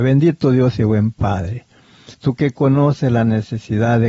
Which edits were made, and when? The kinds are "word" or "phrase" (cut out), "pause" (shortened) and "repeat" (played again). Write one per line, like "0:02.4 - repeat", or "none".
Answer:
0:02.1 - pause